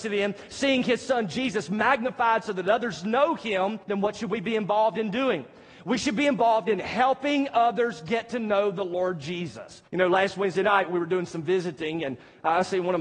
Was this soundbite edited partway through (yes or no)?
yes